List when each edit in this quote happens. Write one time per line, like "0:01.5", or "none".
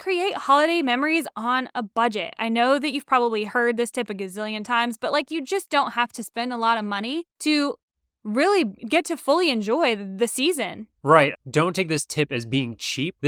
0:07.3
0:08.8
0:10.9